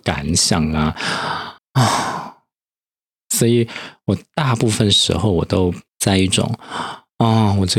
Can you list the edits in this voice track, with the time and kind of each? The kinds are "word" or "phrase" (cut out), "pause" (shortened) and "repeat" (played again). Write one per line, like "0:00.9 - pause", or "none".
0:01.6 - pause
0:05.9 - pause